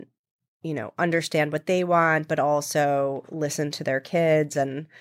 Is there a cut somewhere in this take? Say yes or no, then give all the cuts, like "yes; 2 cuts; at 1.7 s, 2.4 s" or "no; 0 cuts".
no; 0 cuts